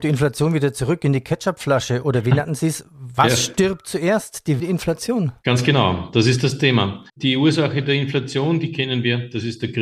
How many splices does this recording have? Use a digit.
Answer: 2